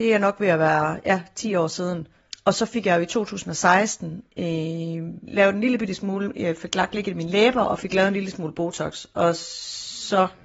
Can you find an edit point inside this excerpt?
no; 0 cuts

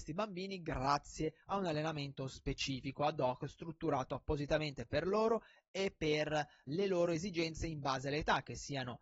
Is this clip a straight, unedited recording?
no; 1 cut; at 6.7 s

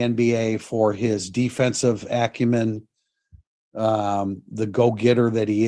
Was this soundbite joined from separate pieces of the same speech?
no; 0 cuts

